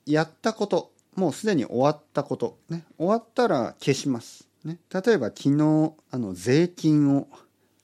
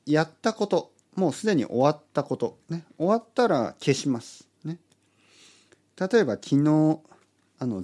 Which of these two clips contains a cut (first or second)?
first